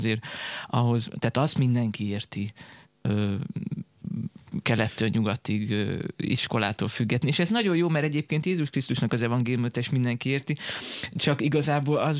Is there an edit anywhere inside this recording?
no; 0 cuts

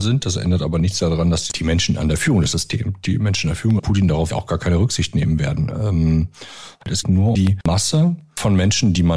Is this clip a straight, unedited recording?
no; 5 cuts; at 2.5 s, 3.8 s, 4.3 s, 7.0 s, 7.3 s

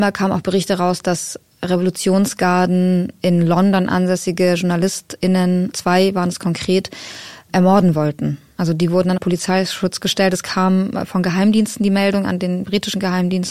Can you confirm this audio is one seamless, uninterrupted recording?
no; 2 cuts; at 5.7 s, 9.2 s

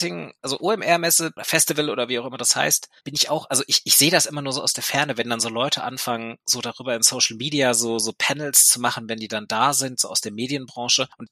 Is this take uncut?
no; 1 cut; at 3.0 s

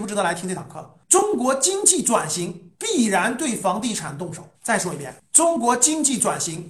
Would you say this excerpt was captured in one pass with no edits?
no; 2 cuts; at 2.7 s, 4.5 s

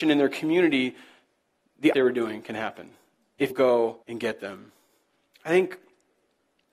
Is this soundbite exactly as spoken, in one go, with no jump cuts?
no; 3 cuts; at 1.9 s, 3.5 s, 4.0 s

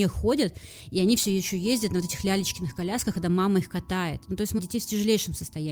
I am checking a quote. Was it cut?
yes; 1 cut; at 4.6 s

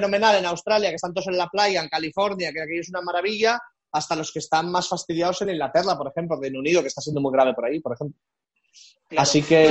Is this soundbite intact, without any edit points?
yes; 0 cuts

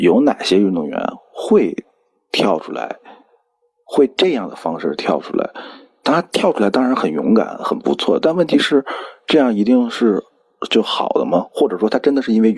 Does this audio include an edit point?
no; 0 cuts

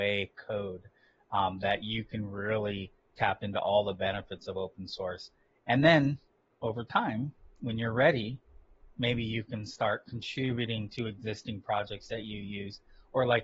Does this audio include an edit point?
no; 0 cuts

